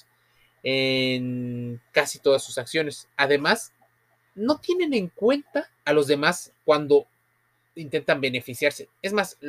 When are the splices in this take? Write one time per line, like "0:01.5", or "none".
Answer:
0:05.7